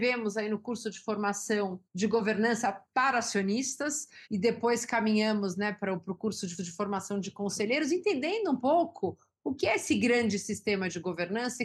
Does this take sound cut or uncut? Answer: cut